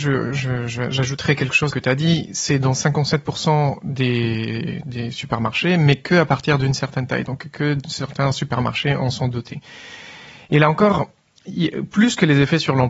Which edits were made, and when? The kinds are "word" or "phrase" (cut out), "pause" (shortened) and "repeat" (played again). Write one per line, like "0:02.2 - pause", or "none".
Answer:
0:01.7 - phrase